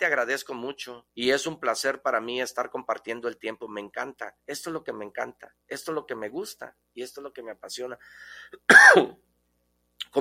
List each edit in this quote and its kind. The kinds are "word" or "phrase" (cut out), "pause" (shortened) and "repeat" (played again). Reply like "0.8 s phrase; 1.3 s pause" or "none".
1.1 s pause; 4.4 s pause; 5.6 s pause